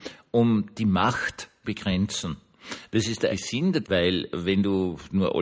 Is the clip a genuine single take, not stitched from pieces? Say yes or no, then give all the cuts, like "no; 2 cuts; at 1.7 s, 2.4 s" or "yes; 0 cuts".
no; 3 cuts; at 1.6 s, 3.3 s, 3.8 s